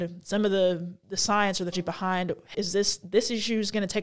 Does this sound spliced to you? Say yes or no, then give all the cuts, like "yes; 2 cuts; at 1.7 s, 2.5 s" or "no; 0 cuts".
yes; 3 cuts; at 1.0 s, 1.7 s, 2.5 s